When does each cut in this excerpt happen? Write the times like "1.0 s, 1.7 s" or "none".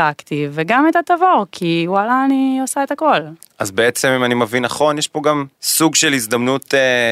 5.5 s